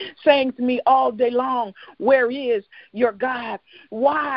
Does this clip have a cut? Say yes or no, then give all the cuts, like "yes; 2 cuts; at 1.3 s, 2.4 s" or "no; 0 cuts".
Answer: no; 0 cuts